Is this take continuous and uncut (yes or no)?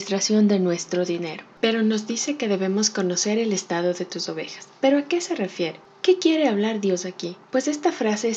no